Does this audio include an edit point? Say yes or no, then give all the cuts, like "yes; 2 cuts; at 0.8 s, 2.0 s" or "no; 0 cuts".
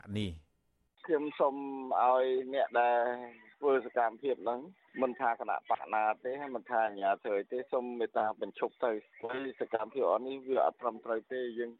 no; 0 cuts